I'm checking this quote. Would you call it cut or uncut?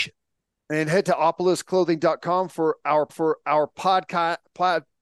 cut